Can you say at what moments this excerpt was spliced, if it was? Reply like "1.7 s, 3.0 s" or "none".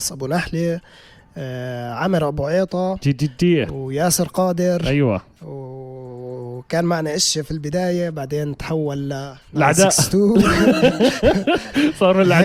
none